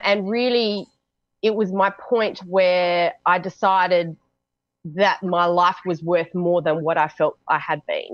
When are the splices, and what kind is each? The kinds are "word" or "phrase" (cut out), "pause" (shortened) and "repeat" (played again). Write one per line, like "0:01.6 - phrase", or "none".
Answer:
none